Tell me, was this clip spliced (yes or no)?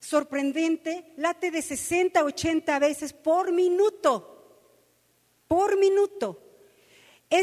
no